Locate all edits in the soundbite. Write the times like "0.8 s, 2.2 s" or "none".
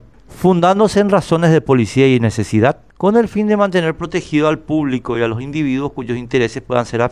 none